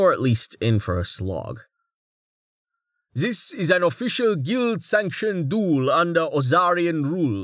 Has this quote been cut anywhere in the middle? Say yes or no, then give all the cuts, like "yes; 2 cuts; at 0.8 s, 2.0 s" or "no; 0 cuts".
no; 0 cuts